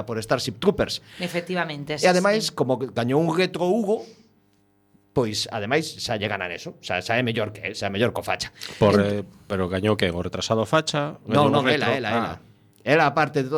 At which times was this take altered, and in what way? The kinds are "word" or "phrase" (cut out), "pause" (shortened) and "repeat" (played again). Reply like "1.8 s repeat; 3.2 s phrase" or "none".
none